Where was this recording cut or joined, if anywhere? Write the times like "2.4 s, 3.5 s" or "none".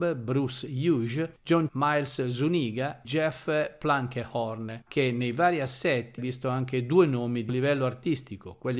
1.7 s, 3.0 s, 4.9 s, 6.2 s, 7.5 s

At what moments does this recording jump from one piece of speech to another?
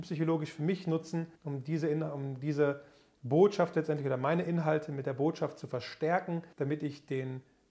1.4 s, 6.5 s

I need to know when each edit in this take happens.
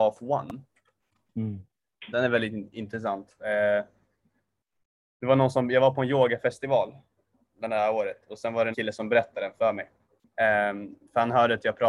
8.7 s

